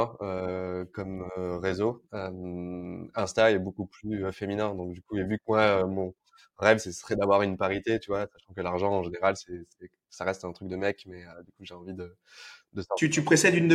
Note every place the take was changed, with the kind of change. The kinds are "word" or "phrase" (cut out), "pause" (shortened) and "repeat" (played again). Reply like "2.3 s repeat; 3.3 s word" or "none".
none

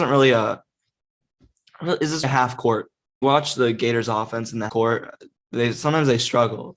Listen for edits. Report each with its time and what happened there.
2.2 s word; 3.2 s phrase; 4.7 s word

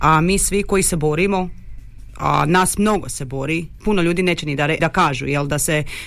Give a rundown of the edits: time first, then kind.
3.8 s word; 4.8 s word

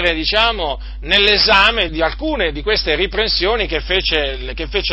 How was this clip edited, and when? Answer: 1.9 s word

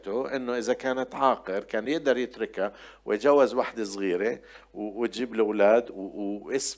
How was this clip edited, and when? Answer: none

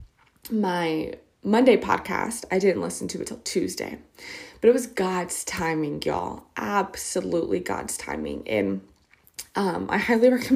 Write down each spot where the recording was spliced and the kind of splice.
none

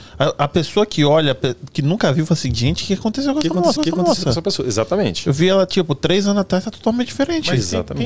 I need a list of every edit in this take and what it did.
3.8 s repeat

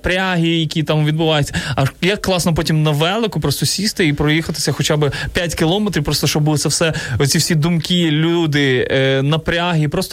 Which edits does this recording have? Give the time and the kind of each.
none

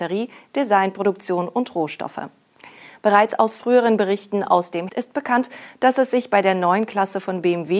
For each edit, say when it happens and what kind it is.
4.9 s word

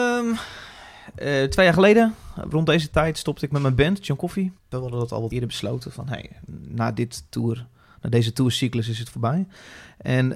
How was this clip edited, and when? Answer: 4.6 s pause

